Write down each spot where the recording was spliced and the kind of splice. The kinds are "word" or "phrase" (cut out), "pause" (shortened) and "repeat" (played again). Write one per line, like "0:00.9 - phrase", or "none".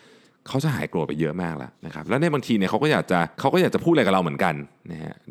0:01.8 - pause
0:03.3 - pause